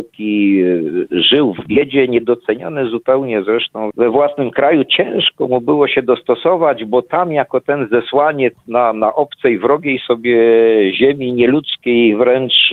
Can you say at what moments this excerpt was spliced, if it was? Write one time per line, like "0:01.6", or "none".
none